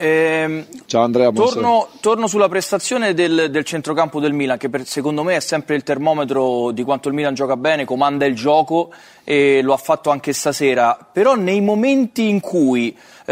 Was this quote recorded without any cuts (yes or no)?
yes